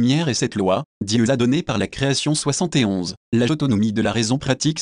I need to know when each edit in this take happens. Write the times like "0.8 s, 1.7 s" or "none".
1.3 s, 3.5 s

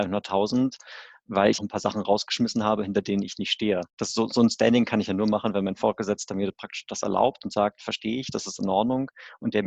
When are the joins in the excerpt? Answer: 1.6 s, 3.9 s

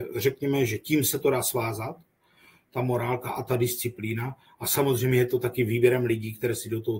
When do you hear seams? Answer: none

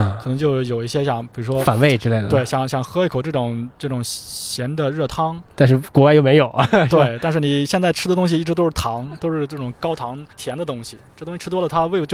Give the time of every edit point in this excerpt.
10.3 s

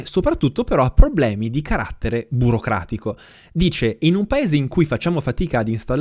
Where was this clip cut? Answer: none

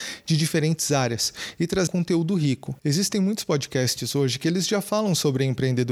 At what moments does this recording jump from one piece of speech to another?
1.9 s, 2.8 s

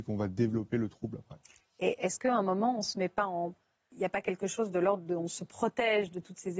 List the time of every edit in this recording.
none

